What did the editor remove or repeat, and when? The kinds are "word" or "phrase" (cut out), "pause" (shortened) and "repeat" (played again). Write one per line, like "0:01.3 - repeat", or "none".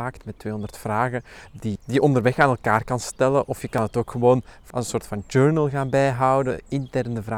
0:01.8 - word
0:04.7 - word